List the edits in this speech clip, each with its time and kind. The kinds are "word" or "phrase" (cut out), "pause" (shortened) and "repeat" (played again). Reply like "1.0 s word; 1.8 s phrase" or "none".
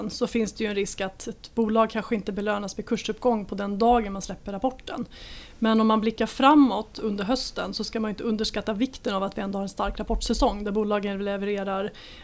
none